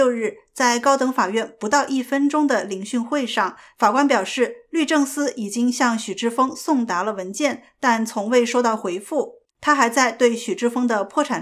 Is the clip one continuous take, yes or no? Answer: no